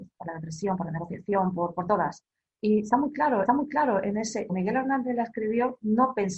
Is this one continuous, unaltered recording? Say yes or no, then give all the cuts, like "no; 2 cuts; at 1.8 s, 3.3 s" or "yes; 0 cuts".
no; 2 cuts; at 3.5 s, 4.5 s